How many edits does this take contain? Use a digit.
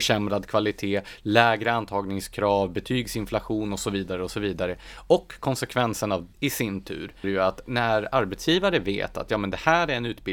2